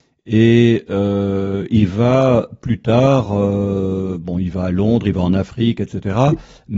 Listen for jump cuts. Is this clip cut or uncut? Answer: uncut